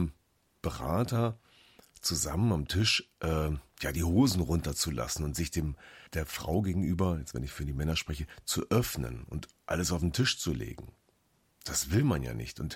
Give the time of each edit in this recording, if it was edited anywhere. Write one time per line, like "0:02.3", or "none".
0:06.1